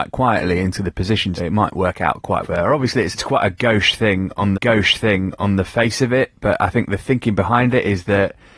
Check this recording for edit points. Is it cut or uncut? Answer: cut